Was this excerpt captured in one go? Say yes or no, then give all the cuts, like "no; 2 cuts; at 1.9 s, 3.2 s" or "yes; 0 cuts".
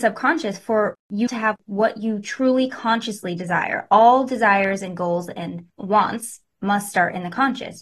no; 2 cuts; at 1.3 s, 5.7 s